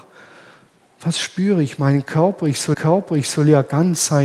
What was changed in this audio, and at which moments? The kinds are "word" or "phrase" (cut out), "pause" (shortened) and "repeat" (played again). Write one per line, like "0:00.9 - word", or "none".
0:02.7 - repeat

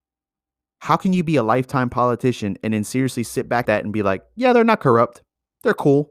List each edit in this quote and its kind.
0:03.6 - phrase

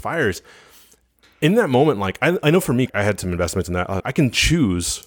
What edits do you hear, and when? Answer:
0:02.9 - word
0:04.0 - word

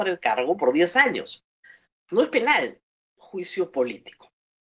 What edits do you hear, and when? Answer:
0:03.2 - word

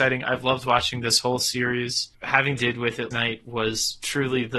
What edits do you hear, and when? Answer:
0:02.6 - phrase
0:03.1 - word

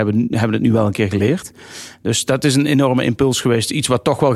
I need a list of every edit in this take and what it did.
none

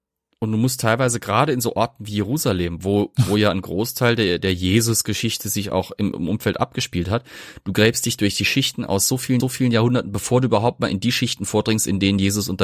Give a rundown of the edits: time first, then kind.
0:04.4 - word
0:09.4 - repeat

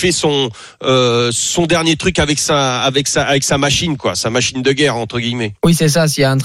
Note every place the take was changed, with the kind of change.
0:05.6 - pause

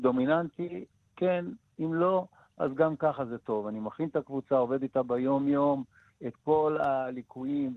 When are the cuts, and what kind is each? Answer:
none

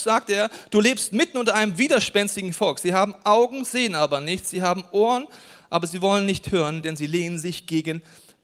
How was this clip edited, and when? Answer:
none

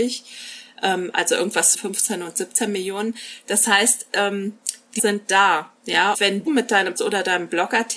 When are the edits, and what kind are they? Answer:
0:01.7 - word
0:05.0 - word
0:06.1 - word
0:06.5 - word
0:07.0 - word

